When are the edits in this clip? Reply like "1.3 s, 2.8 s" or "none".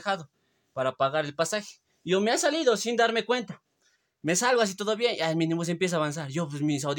none

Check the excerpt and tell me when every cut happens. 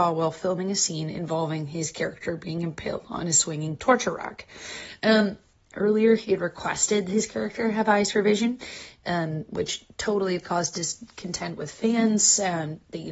none

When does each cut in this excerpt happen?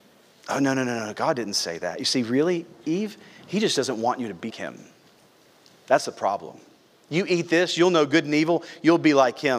4.5 s

